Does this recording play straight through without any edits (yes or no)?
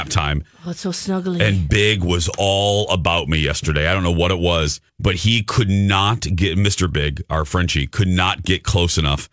no